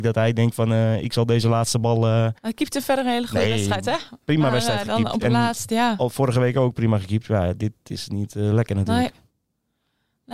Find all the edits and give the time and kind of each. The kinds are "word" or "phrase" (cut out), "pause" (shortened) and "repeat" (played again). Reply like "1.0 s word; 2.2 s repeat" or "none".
2.4 s pause